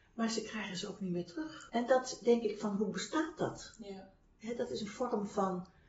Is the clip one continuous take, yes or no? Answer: yes